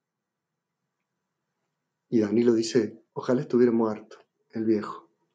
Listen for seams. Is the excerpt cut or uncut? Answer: cut